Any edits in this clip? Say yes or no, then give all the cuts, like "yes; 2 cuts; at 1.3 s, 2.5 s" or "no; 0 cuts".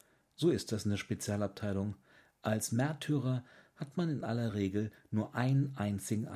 no; 0 cuts